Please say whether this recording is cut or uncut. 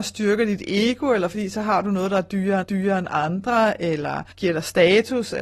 cut